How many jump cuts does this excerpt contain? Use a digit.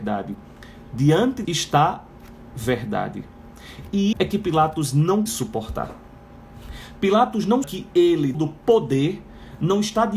6